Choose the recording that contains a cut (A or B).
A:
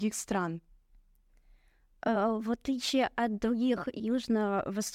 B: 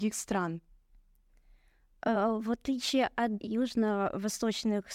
B